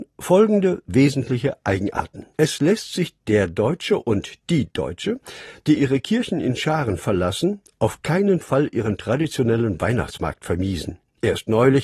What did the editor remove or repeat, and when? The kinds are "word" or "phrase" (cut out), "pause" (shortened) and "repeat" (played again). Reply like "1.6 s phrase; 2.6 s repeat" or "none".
2.3 s pause; 5.8 s word